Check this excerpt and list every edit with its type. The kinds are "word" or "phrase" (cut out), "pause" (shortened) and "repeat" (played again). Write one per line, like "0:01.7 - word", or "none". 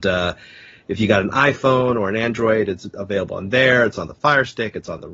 none

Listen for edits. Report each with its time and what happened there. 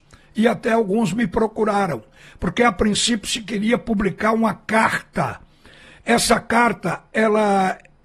none

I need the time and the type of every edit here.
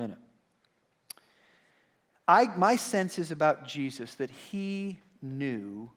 none

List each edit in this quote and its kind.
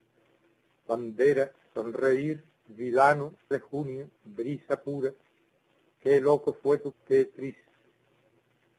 0:03.5 - phrase
0:04.2 - pause
0:06.9 - word

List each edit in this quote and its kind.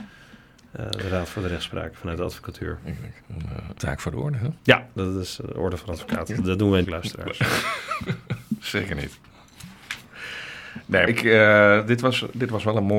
0:03.2 - pause
0:03.8 - word
0:04.6 - pause
0:06.8 - phrase
0:11.1 - word

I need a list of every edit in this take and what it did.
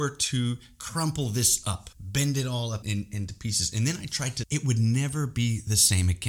0:01.9 - pause
0:02.8 - word
0:04.4 - phrase

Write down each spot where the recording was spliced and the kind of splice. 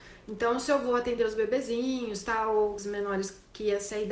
0:02.8 - word

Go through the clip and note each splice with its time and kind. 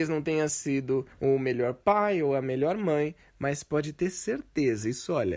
0:01.1 - pause

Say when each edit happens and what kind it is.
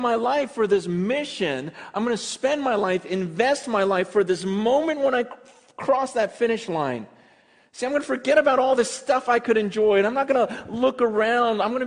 none

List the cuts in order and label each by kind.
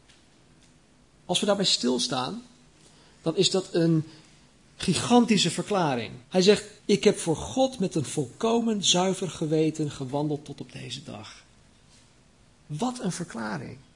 0:06.2 - pause
0:06.8 - pause

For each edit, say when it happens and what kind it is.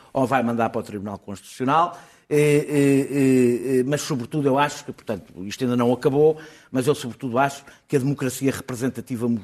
none

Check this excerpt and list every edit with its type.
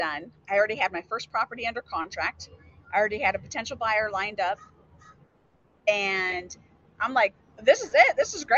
none

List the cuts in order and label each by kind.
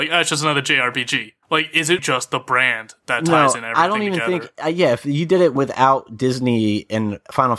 0:01.4 - pause
0:02.0 - word
0:05.6 - word

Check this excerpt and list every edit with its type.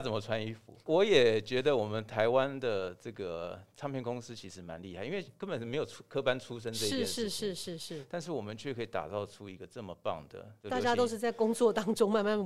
0:10.6 - pause

